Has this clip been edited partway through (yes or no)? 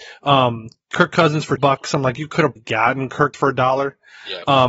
yes